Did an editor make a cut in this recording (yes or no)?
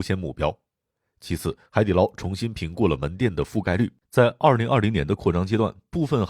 yes